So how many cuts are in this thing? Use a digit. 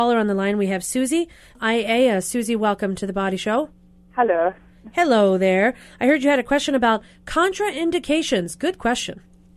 1